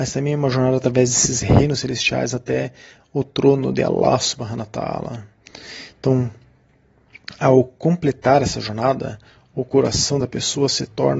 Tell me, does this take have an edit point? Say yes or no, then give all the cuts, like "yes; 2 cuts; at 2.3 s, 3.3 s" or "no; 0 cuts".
no; 0 cuts